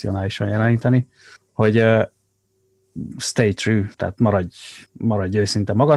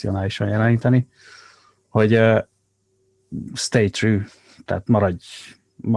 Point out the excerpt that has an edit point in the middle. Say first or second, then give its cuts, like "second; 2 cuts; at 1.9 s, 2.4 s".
first; 3 cuts; at 1.4 s, 3.9 s, 4.9 s